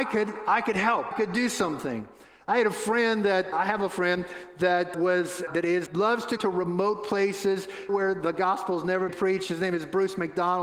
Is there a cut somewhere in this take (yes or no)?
yes